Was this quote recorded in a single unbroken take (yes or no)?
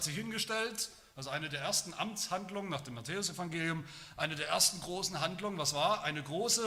yes